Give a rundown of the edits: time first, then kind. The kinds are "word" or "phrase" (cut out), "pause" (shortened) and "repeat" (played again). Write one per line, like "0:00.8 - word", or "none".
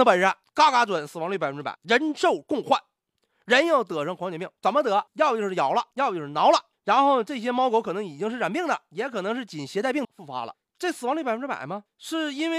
0:10.0 - word